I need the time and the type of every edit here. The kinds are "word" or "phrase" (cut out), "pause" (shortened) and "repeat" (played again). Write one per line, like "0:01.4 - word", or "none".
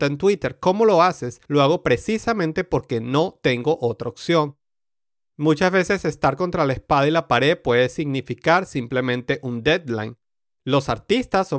0:01.4 - pause